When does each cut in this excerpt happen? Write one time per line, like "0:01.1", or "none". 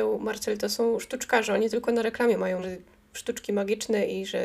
0:02.6